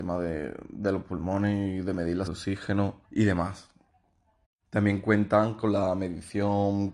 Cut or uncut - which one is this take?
cut